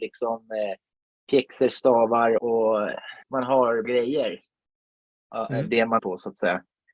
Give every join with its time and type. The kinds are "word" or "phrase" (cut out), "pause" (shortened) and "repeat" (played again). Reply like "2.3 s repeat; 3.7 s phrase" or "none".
2.4 s word; 3.2 s pause; 3.8 s word; 6.0 s word

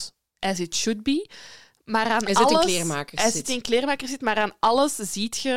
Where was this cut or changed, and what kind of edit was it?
none

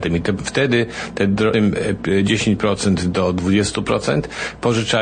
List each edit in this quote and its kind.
1.5 s word

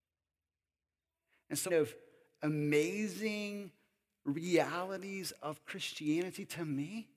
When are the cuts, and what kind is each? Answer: 1.7 s phrase

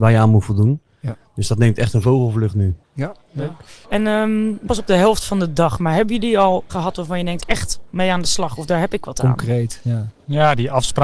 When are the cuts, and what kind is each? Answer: 2.8 s pause; 3.8 s pause; 4.7 s word; 6.7 s word; 7.4 s phrase

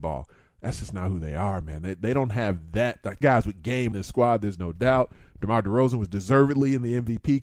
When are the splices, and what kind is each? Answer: 3.2 s word; 3.9 s word

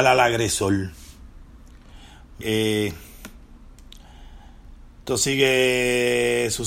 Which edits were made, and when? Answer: 2.4 s word

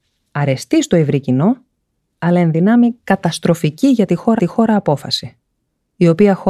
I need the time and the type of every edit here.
4.4 s repeat

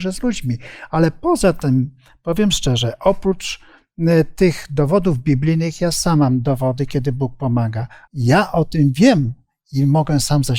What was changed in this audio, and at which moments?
none

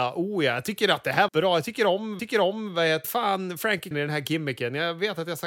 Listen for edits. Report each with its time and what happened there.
1.3 s word; 2.2 s repeat; 3.0 s phrase; 3.9 s word

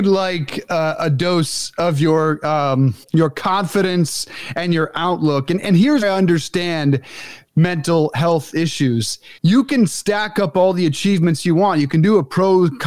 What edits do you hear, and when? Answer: 3.0 s pause; 6.0 s word; 9.4 s pause

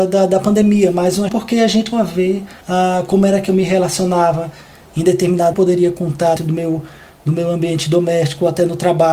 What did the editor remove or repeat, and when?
1.3 s word; 1.9 s word; 2.6 s pause; 5.5 s phrase; 6.4 s word

